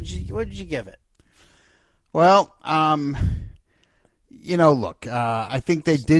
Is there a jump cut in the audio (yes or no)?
no